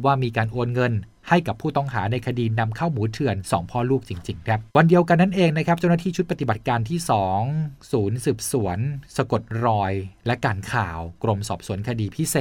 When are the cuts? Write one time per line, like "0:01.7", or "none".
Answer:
0:04.7